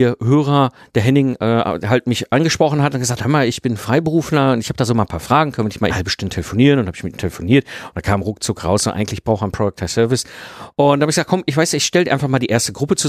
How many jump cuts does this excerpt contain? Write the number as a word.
one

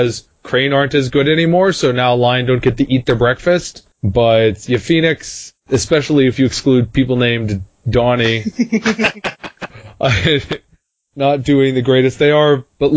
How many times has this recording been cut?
two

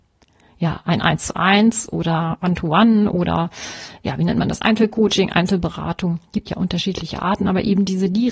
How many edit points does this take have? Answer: one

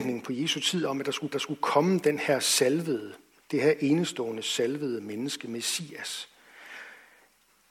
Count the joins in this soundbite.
one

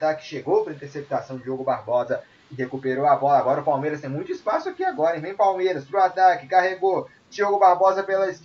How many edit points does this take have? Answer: zero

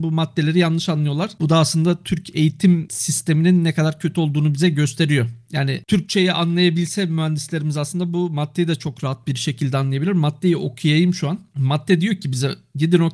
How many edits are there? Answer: zero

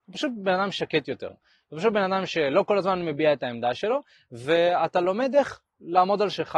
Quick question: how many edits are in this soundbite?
zero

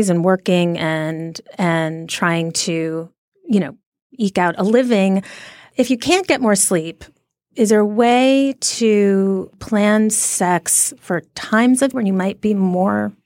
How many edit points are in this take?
one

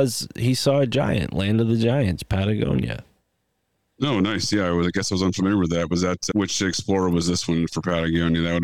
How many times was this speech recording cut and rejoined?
zero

